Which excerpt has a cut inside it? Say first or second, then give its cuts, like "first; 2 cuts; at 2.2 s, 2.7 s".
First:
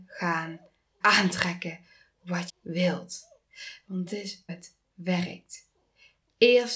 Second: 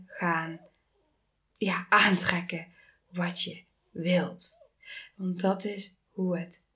first; 4 cuts; at 1.0 s, 2.5 s, 4.1 s, 4.5 s